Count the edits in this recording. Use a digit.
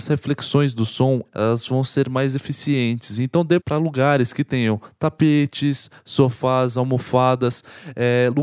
1